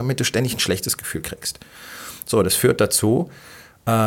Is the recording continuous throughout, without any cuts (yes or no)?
yes